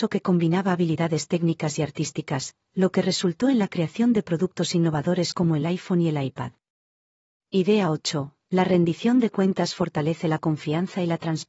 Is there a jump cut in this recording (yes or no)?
no